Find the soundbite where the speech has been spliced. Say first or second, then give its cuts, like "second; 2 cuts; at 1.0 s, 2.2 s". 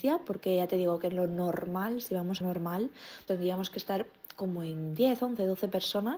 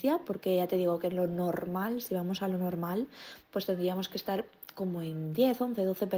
first; 2 cuts; at 2.4 s, 3.3 s